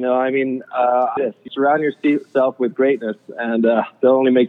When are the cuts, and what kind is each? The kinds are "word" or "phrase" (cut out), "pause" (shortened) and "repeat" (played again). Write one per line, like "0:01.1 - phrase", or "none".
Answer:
0:01.2 - phrase
0:01.5 - word